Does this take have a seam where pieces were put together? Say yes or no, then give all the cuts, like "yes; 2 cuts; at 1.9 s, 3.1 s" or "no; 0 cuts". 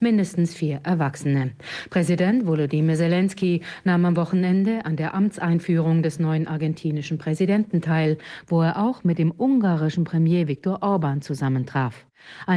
no; 0 cuts